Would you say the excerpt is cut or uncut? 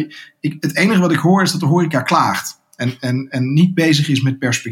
uncut